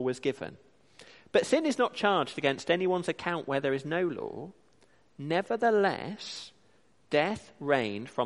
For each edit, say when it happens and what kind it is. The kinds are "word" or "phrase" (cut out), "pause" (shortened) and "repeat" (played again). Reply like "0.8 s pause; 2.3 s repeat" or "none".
none